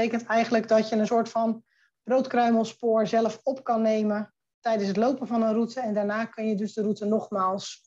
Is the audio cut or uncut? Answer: uncut